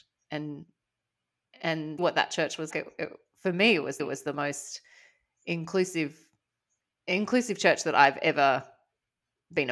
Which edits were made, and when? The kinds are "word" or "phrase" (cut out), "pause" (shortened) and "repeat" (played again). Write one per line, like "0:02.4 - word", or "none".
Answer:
0:02.0 - word
0:02.7 - word
0:04.0 - repeat